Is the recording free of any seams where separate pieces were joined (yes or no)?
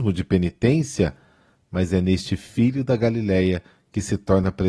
yes